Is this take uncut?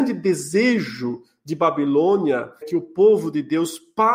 no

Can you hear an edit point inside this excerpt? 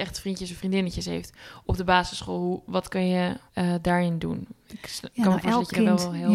yes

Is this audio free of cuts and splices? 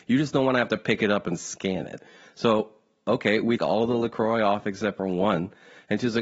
no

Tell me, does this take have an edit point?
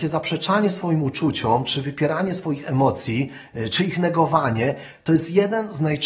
no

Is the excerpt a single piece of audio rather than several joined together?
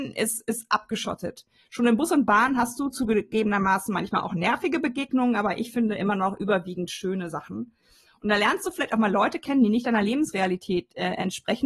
yes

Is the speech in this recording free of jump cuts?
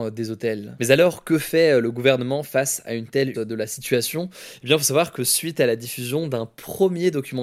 no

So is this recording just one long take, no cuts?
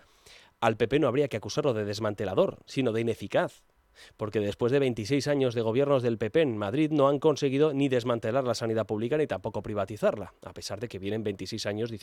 yes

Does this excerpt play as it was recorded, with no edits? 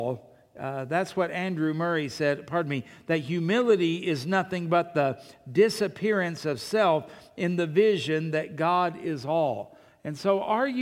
yes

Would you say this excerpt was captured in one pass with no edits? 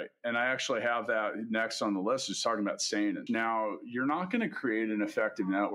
no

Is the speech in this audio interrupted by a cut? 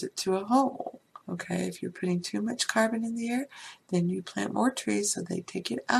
yes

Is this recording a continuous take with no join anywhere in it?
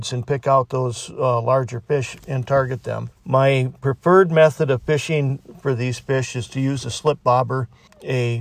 no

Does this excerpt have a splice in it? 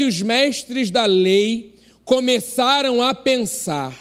no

